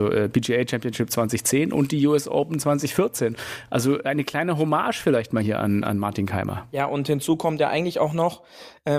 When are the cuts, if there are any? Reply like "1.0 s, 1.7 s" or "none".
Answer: none